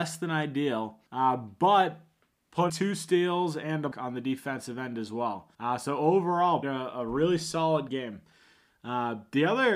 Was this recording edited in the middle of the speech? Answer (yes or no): yes